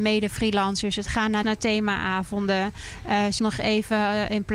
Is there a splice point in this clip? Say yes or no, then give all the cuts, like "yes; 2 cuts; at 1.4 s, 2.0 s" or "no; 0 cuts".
yes; 2 cuts; at 1.4 s, 3.4 s